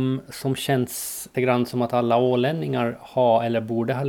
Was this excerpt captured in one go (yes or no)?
no